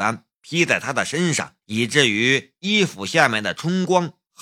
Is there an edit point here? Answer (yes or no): yes